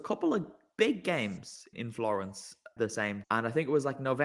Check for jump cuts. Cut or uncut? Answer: cut